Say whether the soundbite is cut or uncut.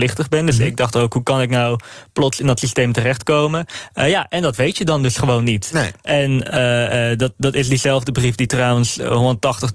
uncut